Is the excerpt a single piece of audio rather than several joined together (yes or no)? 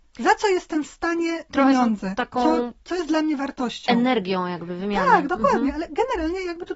no